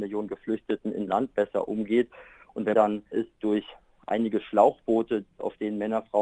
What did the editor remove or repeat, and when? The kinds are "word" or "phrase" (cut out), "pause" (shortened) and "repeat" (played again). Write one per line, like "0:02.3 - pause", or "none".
0:01.1 - word
0:02.7 - word
0:03.1 - word